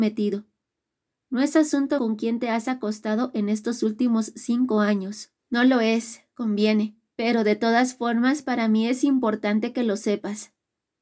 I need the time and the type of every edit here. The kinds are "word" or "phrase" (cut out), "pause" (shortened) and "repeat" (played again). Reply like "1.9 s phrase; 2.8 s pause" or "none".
2.0 s word; 5.4 s pause; 7.1 s pause